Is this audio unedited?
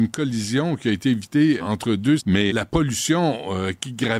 no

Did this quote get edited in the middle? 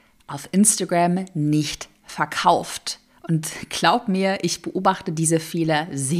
no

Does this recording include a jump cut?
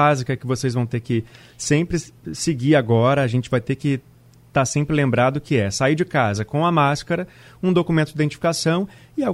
no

